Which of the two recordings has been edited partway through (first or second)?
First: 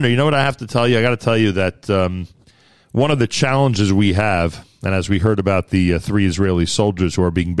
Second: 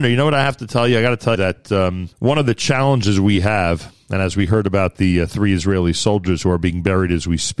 second